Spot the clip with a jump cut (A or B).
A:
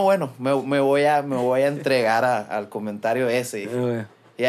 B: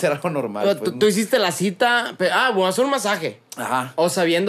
B